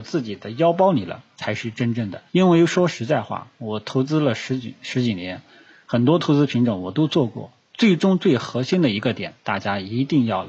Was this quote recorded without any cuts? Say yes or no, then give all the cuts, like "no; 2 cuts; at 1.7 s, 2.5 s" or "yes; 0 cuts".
no; 1 cut; at 2.3 s